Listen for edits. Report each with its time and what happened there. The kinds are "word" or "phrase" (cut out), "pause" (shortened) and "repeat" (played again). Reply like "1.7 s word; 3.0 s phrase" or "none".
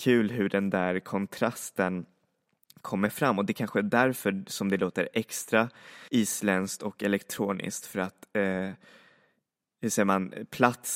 6.1 s pause